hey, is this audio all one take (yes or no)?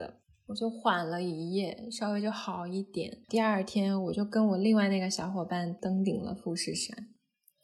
no